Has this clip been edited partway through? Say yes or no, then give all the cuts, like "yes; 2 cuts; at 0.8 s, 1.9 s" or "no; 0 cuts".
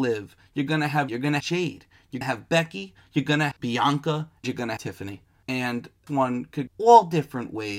yes; 8 cuts; at 1.1 s, 1.4 s, 2.2 s, 3.5 s, 4.4 s, 4.8 s, 6.1 s, 6.7 s